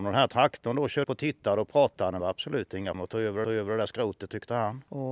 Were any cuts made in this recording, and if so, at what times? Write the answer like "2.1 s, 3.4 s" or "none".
1.0 s, 2.2 s, 2.9 s, 3.4 s